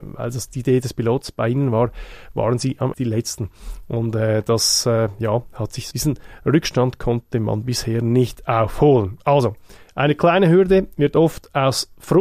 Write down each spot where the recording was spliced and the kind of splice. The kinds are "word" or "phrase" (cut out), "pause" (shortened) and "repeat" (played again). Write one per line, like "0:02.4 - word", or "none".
0:02.9 - phrase
0:05.9 - word